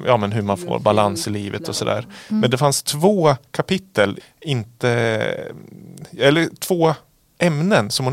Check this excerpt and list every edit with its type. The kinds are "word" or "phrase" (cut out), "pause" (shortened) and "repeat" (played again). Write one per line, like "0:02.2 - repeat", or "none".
0:04.2 - phrase